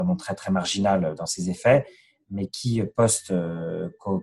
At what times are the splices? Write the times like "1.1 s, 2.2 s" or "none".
none